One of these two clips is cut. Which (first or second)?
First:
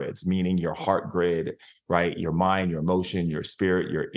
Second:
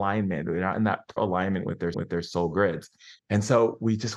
second